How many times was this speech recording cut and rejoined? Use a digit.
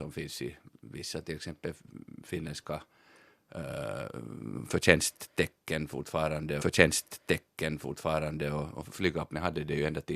1